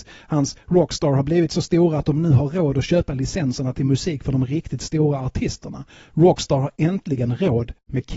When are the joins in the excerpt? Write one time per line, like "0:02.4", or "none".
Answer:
none